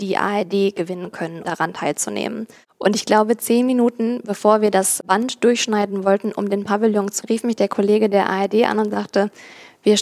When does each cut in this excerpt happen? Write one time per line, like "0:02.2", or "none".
0:01.4
0:07.2